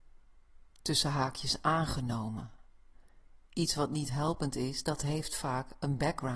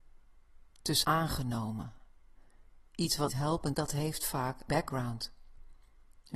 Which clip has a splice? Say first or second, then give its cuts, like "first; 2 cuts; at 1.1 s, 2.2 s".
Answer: second; 4 cuts; at 1.0 s, 3.3 s, 3.7 s, 4.7 s